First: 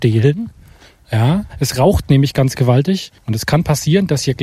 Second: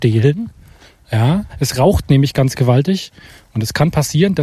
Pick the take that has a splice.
first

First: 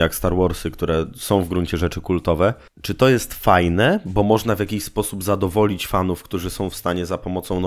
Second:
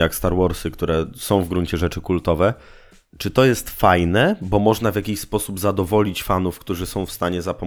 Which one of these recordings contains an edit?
first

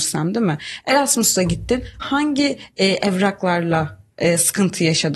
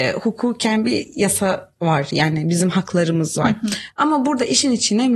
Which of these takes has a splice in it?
first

